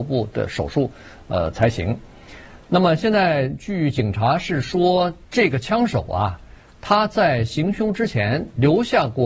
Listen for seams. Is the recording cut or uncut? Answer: uncut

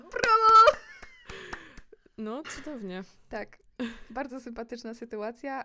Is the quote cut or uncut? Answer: cut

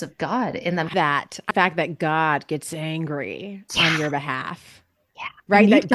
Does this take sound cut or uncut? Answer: cut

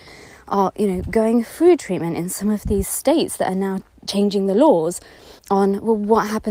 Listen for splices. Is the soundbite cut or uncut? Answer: cut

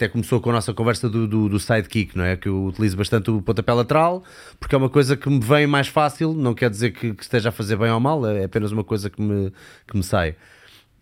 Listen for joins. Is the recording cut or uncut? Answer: uncut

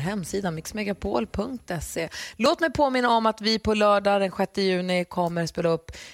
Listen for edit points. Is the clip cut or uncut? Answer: uncut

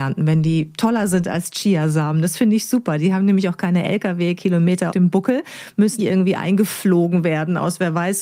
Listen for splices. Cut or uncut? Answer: cut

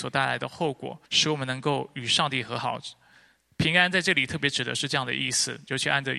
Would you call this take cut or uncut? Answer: cut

